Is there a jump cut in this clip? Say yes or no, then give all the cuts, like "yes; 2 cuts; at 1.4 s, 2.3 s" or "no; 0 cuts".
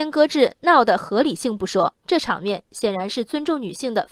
yes; 1 cut; at 2.0 s